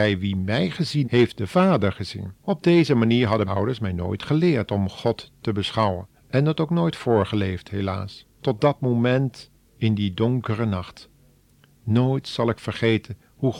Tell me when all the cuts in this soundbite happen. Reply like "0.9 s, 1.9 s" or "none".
1.0 s, 2.4 s, 3.5 s, 6.1 s, 8.3 s